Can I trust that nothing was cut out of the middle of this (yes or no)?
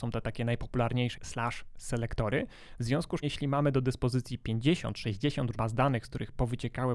no